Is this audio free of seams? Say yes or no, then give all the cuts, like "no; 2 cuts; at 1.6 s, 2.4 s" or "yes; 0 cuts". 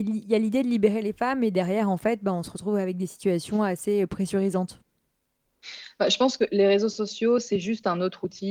yes; 0 cuts